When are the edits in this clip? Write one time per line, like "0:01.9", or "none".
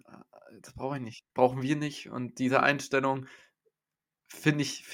none